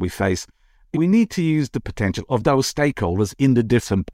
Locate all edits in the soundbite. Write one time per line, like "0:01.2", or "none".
0:00.9